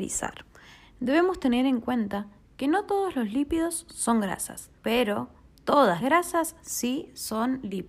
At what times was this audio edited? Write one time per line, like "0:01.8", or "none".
0:04.8
0:06.0